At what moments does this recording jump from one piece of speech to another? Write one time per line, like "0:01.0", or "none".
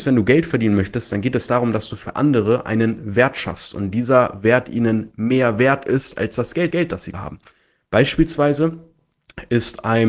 0:06.7
0:07.1